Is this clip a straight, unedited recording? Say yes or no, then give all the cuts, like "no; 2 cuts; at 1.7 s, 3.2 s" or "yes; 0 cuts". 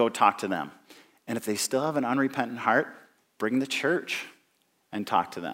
yes; 0 cuts